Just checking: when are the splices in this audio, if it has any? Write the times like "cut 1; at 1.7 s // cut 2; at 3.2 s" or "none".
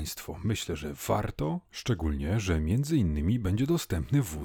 cut 1; at 1.6 s

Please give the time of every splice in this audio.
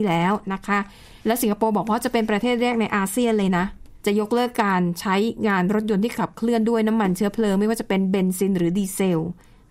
cut 1; at 1.2 s // cut 2; at 4.0 s

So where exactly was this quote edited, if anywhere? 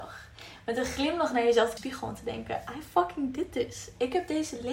cut 1; at 1.8 s

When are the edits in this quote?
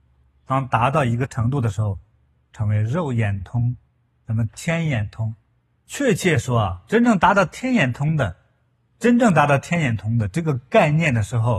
none

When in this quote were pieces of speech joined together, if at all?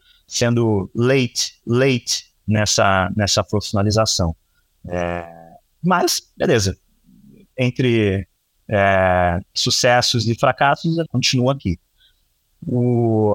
cut 1; at 1.6 s // cut 2; at 11.1 s

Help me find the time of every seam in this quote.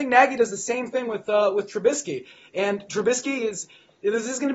none

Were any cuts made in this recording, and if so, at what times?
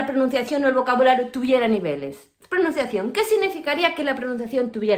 none

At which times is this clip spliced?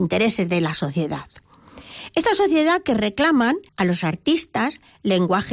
cut 1; at 3.7 s

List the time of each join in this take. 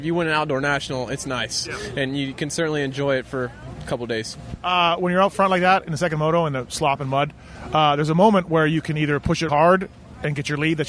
cut 1; at 9.5 s

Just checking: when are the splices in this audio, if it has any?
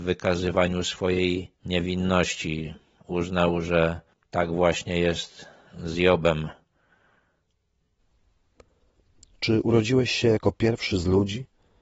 none

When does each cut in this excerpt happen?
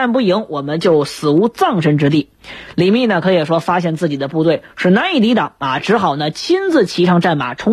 none

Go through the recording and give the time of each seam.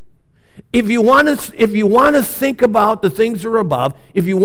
none

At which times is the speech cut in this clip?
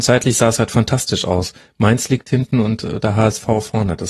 none

